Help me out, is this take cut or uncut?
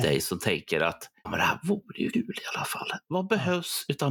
cut